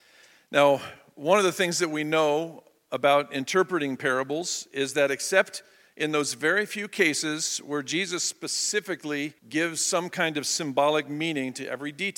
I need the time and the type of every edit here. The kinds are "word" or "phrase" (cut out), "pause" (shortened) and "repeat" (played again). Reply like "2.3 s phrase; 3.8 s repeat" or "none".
9.4 s pause